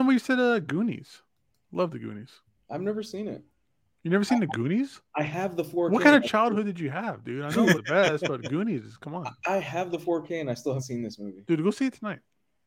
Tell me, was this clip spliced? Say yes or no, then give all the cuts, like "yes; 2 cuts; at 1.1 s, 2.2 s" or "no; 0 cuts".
yes; 2 cuts; at 7.7 s, 10.8 s